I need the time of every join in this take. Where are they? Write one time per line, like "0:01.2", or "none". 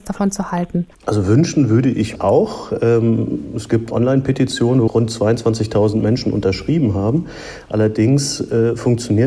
0:00.9
0:02.2
0:03.9
0:04.9